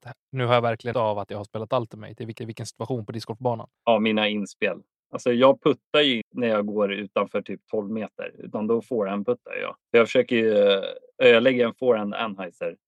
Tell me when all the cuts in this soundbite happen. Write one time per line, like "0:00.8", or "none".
0:00.9
0:02.4
0:03.8
0:06.2
0:09.8